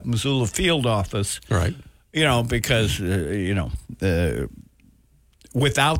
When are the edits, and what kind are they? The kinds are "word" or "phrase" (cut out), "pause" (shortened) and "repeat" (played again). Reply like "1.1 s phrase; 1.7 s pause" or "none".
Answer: none

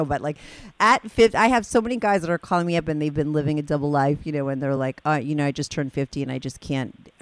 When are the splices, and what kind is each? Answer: none

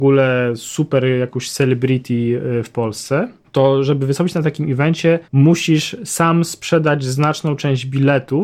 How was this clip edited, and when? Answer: 3.4 s pause; 5.2 s pause

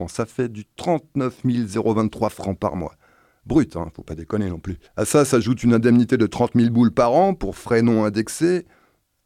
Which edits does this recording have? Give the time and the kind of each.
4.8 s pause

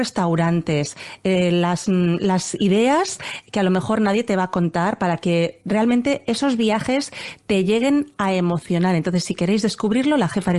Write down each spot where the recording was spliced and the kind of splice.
none

